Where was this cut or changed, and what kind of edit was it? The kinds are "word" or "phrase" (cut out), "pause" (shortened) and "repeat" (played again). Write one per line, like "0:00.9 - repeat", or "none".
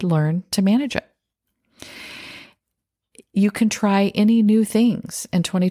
none